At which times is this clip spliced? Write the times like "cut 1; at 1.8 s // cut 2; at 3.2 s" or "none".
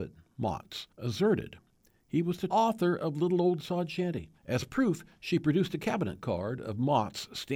cut 1; at 0.9 s // cut 2; at 2.5 s // cut 3; at 4.4 s